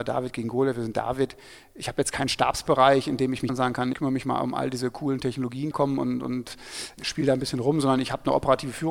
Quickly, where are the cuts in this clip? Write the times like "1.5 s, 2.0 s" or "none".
3.5 s, 3.9 s, 5.7 s, 7.0 s